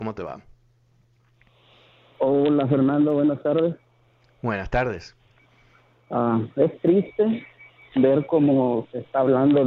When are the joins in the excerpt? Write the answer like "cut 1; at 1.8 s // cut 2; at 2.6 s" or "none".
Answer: none

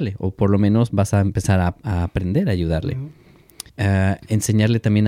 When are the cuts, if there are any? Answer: cut 1; at 3.7 s

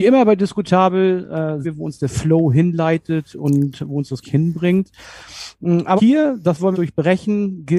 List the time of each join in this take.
cut 1; at 1.6 s // cut 2; at 4.2 s // cut 3; at 6.0 s // cut 4; at 6.7 s

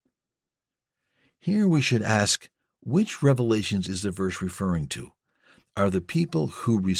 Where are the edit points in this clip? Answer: none

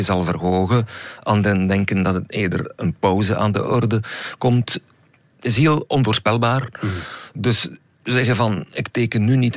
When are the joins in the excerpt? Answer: none

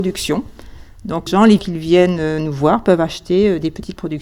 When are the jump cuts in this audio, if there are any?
cut 1; at 1.3 s // cut 2; at 1.6 s

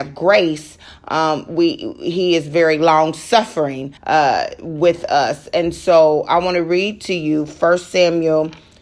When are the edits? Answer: cut 1; at 4.0 s

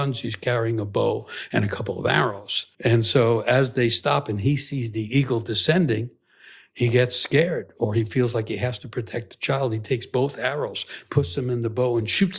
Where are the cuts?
cut 1; at 2.7 s

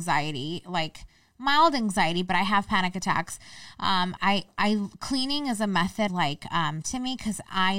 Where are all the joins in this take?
cut 1; at 4.2 s // cut 2; at 6.1 s // cut 3; at 6.8 s

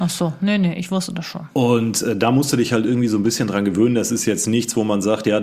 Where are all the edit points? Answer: none

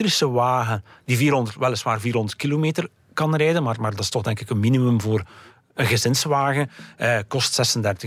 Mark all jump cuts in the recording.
none

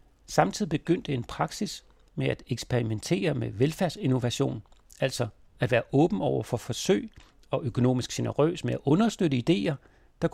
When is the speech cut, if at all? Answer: none

